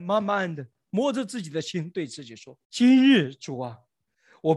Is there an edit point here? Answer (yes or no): yes